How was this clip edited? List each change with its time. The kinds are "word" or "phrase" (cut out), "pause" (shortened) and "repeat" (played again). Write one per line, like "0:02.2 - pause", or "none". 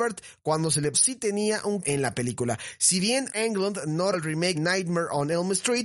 0:00.9 - word
0:01.8 - word
0:03.3 - word
0:04.1 - word
0:04.5 - word